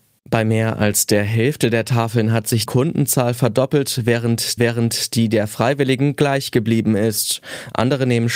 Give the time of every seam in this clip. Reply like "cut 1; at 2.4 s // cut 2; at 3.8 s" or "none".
cut 1; at 2.7 s // cut 2; at 4.6 s